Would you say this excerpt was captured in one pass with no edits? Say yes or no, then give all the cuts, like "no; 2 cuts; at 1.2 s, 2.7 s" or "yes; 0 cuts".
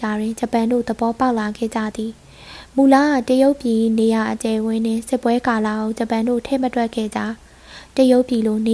yes; 0 cuts